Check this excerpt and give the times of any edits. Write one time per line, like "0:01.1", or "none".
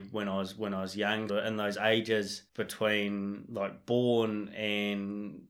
0:01.3
0:02.5

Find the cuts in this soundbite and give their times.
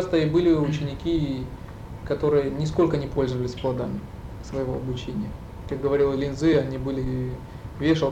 none

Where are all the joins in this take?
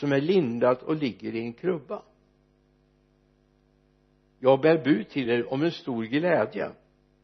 none

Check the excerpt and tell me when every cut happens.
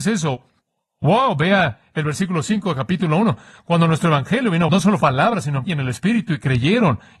0:04.7
0:05.0
0:05.7

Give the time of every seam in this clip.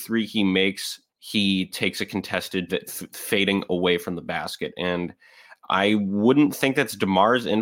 0:01.1
0:02.7

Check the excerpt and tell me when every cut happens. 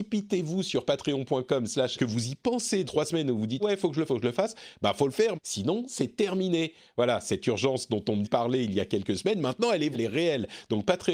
0:02.0
0:02.8
0:03.6
0:04.1
0:05.3
0:08.2
0:09.9

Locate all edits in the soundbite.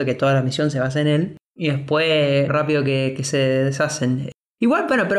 0:01.4
0:02.5

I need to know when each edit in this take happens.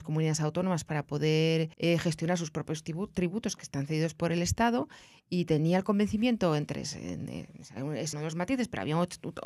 0:01.7
0:08.1

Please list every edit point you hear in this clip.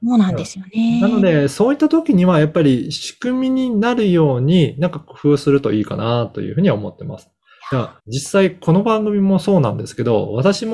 0:08.0

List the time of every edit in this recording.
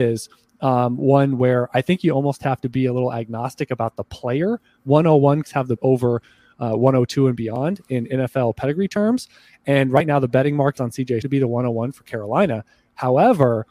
0:05.4
0:05.8
0:10.8
0:11.2

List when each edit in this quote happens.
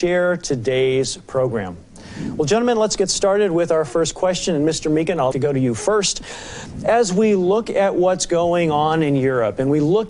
0:05.3

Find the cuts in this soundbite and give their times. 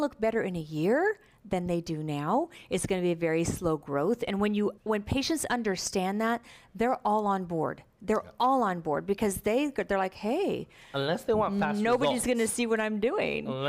0:04.8

